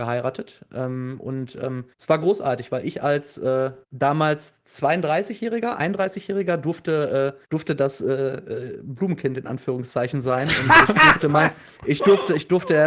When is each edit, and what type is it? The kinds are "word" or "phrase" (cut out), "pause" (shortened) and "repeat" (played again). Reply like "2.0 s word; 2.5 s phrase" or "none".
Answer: 1.9 s pause; 3.8 s pause; 7.4 s pause; 11.8 s pause